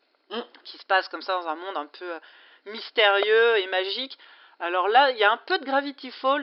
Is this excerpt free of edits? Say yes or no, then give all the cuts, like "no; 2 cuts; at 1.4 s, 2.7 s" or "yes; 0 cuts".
yes; 0 cuts